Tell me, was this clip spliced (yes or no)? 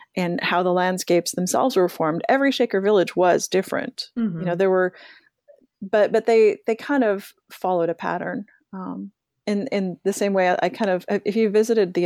no